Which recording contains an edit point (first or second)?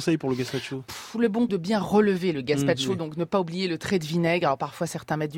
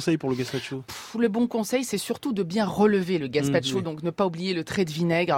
first